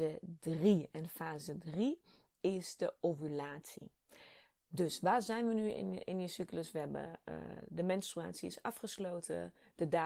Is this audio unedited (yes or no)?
yes